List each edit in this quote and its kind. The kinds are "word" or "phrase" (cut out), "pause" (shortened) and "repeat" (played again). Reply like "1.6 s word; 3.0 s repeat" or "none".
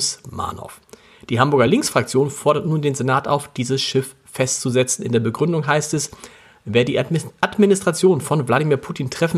none

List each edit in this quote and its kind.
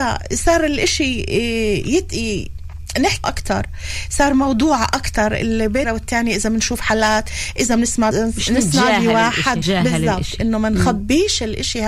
3.2 s word; 5.8 s word; 8.1 s word; 9.6 s word

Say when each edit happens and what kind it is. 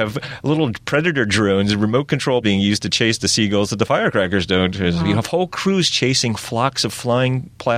2.4 s word

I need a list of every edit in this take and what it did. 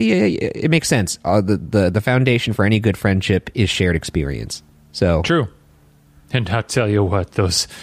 4.7 s pause

